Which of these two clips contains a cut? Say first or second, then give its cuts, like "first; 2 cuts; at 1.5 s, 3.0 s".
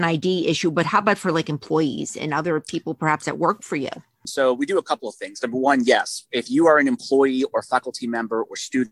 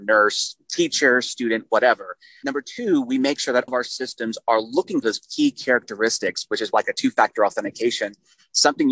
second; 2 cuts; at 3.7 s, 5.0 s